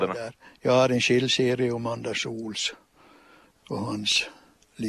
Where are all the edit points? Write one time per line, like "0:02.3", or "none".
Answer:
none